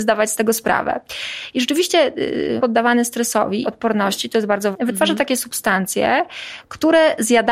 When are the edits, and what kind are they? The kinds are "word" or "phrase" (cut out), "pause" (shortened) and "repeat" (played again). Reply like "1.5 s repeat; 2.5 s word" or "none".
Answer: 2.6 s word; 3.6 s phrase; 4.7 s word